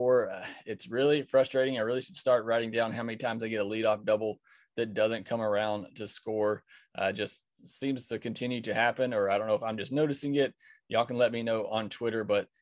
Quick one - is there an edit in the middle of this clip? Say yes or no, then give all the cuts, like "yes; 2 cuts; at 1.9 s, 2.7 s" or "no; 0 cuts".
no; 0 cuts